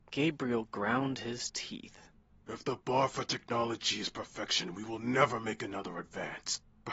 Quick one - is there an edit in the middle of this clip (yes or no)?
no